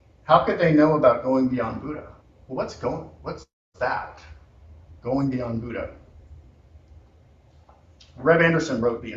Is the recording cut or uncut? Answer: cut